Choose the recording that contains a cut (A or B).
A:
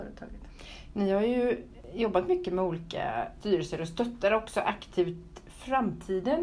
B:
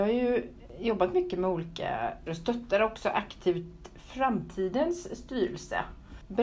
B